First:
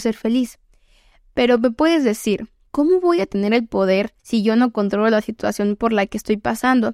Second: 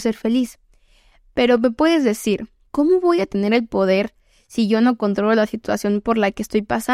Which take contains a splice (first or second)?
first